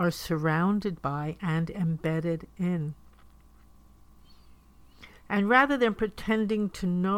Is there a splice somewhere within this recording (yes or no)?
yes